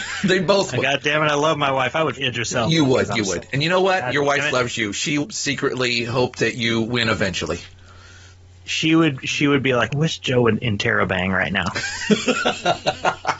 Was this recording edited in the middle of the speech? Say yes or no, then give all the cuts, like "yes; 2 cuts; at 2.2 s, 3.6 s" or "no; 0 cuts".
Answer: yes; 3 cuts; at 2.1 s, 5.2 s, 9.9 s